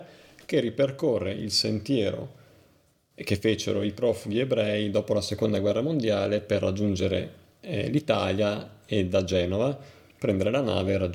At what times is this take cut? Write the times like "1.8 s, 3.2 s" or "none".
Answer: none